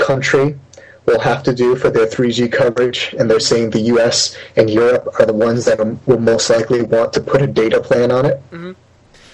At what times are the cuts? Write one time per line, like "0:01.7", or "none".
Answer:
none